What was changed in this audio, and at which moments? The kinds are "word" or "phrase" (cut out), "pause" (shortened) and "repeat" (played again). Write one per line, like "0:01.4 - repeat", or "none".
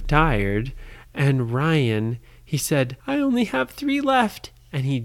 0:03.0 - pause